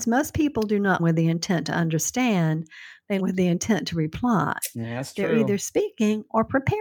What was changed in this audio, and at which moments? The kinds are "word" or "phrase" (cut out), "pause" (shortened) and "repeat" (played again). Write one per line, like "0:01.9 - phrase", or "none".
0:01.0 - word
0:03.2 - word